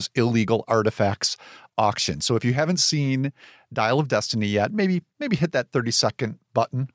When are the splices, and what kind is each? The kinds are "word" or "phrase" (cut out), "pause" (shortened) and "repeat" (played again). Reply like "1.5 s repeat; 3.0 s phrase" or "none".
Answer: none